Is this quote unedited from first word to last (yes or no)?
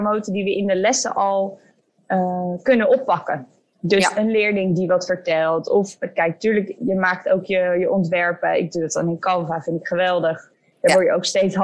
yes